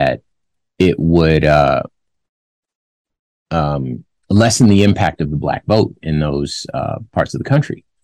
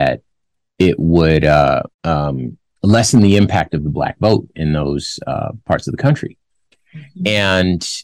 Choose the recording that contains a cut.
second; 1 cut; at 1.9 s

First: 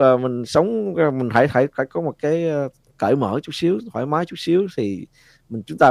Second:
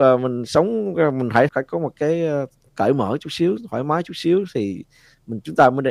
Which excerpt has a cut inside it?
second; 1 cut; at 1.5 s

